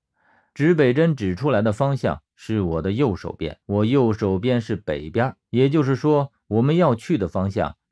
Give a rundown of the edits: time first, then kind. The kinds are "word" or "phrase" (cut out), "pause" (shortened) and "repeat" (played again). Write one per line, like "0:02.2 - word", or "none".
0:03.6 - pause
0:05.4 - pause

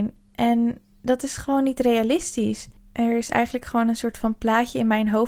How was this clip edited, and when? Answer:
none

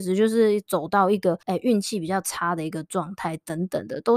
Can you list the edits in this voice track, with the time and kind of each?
0:01.4 - pause

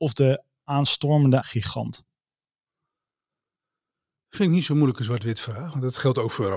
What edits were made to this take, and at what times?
0:01.4 - word

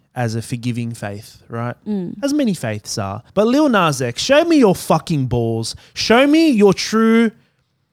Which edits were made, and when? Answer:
0:03.3 - pause

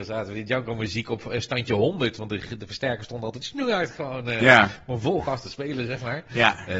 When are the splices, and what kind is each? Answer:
none

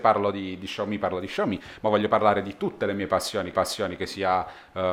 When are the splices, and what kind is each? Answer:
0:03.5 - repeat

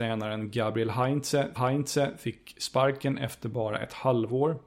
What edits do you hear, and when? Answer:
0:01.6 - repeat

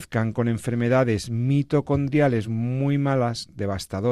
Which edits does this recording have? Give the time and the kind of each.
none

